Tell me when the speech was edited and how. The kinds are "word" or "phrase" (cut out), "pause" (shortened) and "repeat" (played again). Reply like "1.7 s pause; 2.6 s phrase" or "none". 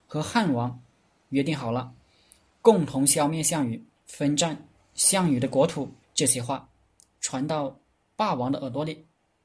4.0 s pause; 6.0 s pause